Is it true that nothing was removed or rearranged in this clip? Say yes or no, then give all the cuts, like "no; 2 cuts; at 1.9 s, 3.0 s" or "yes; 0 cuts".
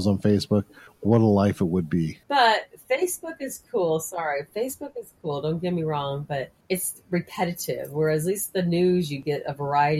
no; 2 cuts; at 2.2 s, 6.6 s